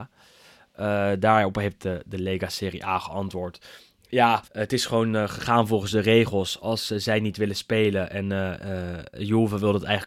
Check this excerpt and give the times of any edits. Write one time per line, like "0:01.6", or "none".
0:04.5